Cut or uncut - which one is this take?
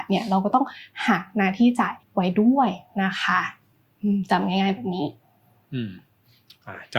cut